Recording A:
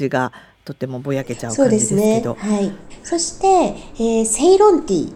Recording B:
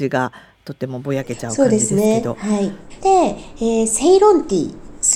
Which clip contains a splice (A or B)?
B